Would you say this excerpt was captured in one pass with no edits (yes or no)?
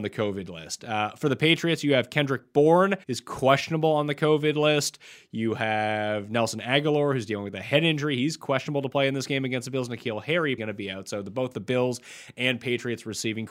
no